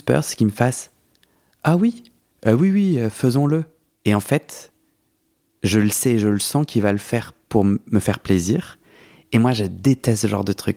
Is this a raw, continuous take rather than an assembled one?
yes; 0 cuts

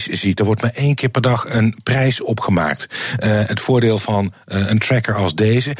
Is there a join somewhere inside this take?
no; 0 cuts

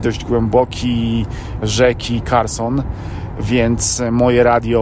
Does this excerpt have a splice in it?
yes; 1 cut; at 1.6 s

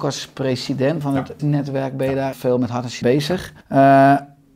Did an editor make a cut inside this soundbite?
yes; 5 cuts; at 1.0 s, 1.4 s, 2.3 s, 3.0 s, 3.6 s

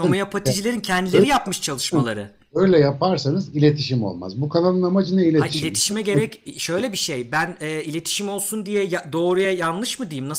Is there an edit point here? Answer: no; 0 cuts

